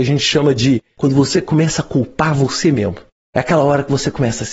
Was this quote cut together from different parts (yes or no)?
no